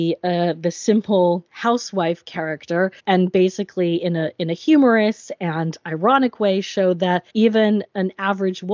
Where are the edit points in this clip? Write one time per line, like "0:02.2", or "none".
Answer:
0:01.5
0:03.0
0:07.3